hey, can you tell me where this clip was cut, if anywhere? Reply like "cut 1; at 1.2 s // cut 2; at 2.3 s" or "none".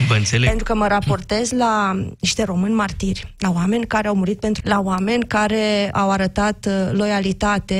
cut 1; at 4.6 s // cut 2; at 5.9 s